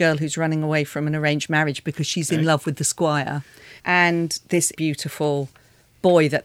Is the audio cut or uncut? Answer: cut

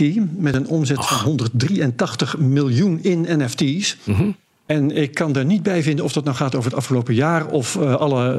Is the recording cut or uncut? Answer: uncut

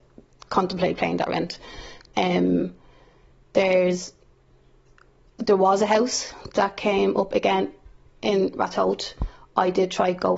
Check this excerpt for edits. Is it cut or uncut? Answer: uncut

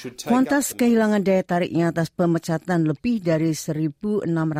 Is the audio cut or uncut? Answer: uncut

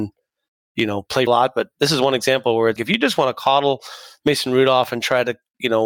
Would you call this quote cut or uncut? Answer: cut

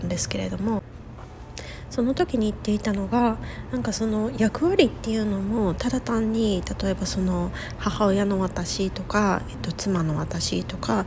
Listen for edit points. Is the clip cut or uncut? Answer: uncut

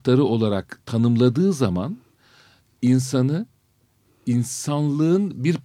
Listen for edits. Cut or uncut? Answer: uncut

